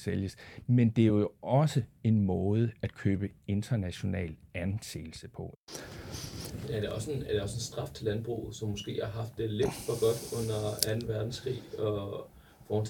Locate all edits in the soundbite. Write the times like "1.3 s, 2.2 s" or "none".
none